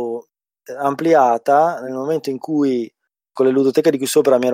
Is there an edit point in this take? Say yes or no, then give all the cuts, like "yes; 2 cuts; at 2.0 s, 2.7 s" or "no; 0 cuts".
no; 0 cuts